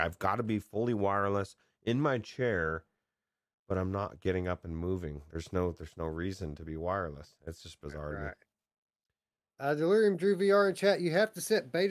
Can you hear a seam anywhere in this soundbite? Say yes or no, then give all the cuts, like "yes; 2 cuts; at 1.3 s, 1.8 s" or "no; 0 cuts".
no; 0 cuts